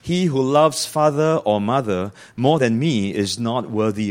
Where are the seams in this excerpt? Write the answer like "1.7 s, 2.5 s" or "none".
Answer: none